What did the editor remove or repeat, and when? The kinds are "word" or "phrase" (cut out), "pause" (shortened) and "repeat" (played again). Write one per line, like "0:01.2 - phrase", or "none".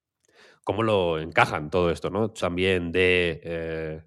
0:02.4 - word